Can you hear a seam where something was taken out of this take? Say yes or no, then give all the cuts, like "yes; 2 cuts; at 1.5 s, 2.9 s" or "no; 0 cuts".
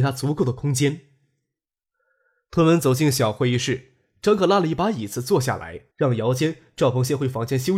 yes; 1 cut; at 5.9 s